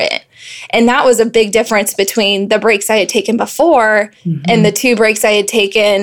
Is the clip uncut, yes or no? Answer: no